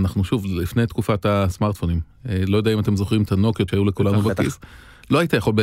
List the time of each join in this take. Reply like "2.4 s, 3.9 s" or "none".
3.7 s

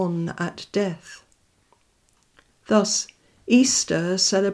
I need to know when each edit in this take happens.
none

